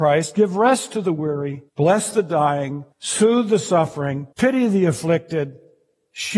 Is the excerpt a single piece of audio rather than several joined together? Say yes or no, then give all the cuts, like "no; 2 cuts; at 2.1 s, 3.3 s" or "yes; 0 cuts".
no; 3 cuts; at 1.7 s, 2.9 s, 4.3 s